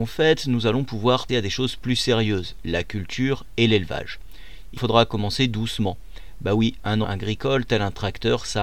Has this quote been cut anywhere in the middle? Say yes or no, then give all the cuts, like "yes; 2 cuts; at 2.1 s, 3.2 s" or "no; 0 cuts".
yes; 3 cuts; at 1.3 s, 4.8 s, 7.0 s